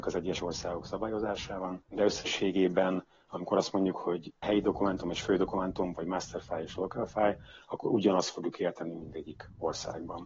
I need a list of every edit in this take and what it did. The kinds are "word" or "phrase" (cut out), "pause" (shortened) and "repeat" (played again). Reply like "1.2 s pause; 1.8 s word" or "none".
none